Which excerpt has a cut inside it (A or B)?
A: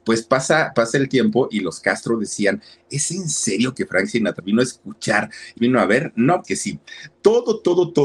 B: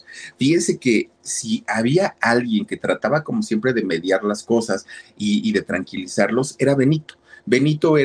A